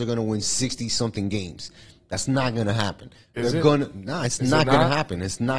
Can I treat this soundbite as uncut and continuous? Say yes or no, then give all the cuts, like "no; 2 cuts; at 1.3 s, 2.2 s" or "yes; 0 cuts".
yes; 0 cuts